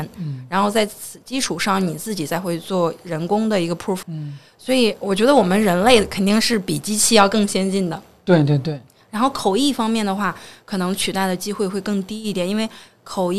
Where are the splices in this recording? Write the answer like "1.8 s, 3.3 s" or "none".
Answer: 4.0 s